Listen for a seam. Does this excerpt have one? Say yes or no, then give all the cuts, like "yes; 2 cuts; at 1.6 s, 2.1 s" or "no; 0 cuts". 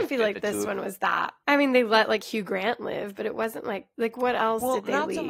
yes; 2 cuts; at 1.4 s, 3.9 s